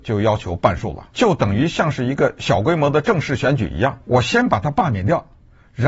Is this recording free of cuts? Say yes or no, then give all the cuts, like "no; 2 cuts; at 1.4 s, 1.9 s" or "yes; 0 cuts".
no; 2 cuts; at 1.1 s, 4.0 s